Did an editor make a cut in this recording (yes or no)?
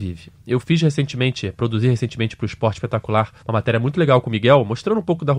yes